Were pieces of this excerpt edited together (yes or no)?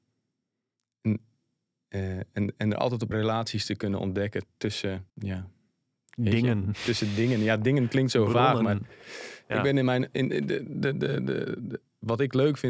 yes